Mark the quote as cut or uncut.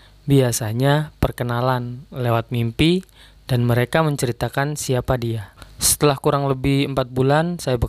uncut